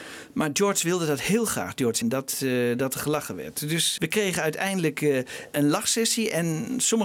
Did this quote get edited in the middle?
yes; 2 cuts; at 2.0 s, 4.0 s

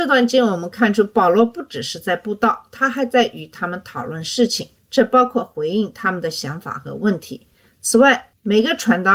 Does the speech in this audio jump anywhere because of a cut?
no; 0 cuts

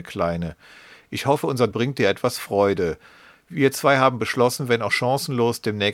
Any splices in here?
yes; 1 cut; at 1.7 s

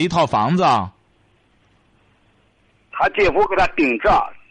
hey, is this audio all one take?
yes; 0 cuts

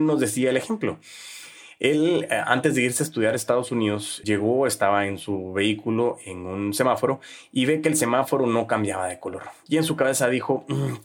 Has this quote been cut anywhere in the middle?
yes; 1 cut; at 4.2 s

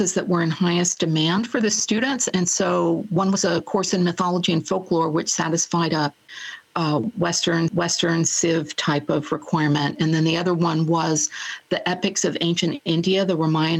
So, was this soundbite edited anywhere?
yes; 1 cut; at 7.7 s

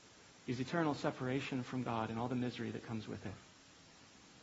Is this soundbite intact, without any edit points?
yes; 0 cuts

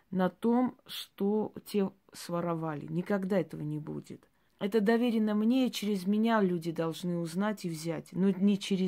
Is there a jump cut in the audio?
yes; 1 cut; at 4.5 s

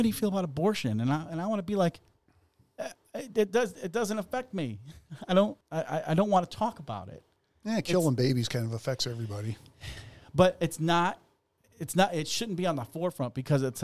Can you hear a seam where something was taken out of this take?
yes; 2 cuts; at 5.6 s, 11.6 s

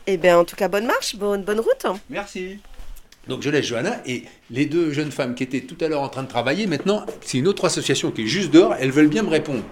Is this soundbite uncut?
no; 1 cut; at 3.1 s

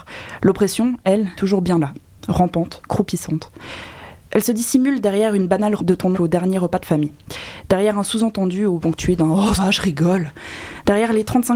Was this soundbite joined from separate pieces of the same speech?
yes; 6 cuts; at 1.4 s, 2.8 s, 5.8 s, 6.1 s, 8.8 s, 9.6 s

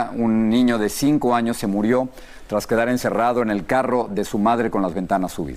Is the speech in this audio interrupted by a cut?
no; 0 cuts

